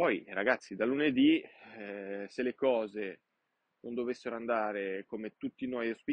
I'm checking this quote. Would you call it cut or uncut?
uncut